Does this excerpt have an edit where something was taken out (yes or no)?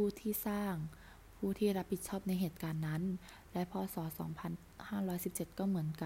no